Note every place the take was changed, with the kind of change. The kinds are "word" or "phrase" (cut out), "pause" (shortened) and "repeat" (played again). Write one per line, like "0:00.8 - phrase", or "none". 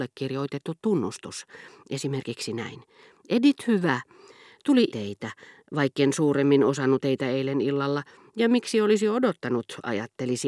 0:04.9 - word
0:07.0 - word